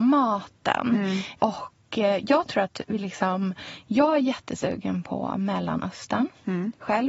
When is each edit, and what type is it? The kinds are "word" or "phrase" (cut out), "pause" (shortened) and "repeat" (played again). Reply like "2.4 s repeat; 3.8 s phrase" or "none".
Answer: none